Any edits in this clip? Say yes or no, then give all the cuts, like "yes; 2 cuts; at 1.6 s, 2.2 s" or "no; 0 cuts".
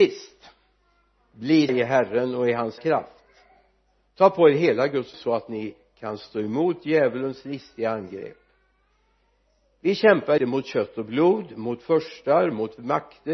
yes; 4 cuts; at 1.7 s, 2.8 s, 5.1 s, 10.4 s